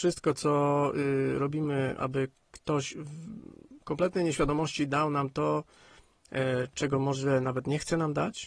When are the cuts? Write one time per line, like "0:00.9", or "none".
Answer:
none